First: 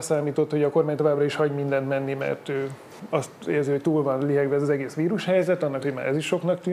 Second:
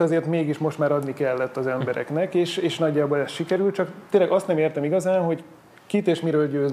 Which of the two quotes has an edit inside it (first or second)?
first